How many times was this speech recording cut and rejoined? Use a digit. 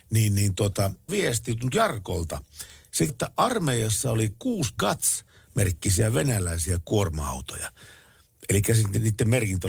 4